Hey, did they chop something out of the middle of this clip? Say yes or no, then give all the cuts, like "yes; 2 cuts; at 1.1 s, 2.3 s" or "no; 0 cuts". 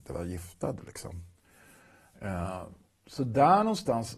no; 0 cuts